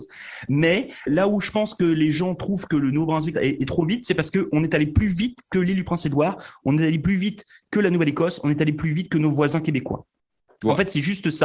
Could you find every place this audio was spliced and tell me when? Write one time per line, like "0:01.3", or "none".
0:01.1
0:03.3
0:03.7